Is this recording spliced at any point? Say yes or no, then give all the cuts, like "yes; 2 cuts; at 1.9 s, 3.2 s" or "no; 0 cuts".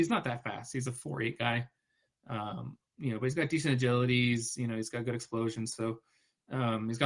no; 0 cuts